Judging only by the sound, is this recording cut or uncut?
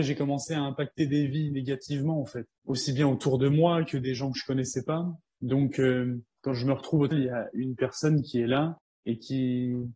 cut